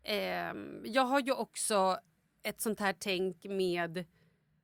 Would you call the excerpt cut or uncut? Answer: uncut